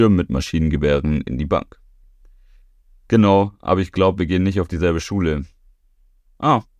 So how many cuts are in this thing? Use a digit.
0